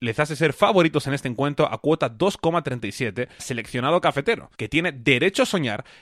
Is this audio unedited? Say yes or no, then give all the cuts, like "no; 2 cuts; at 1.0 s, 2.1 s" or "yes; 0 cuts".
no; 2 cuts; at 3.4 s, 4.5 s